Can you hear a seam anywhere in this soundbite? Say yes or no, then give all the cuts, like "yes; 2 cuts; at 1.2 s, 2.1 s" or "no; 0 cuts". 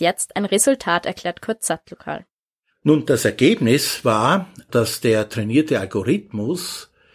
no; 0 cuts